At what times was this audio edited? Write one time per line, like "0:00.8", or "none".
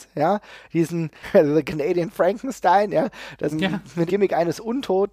0:01.2
0:03.5
0:04.1

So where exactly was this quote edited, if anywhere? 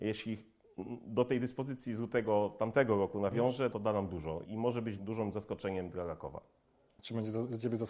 0:03.7
0:04.4
0:05.0

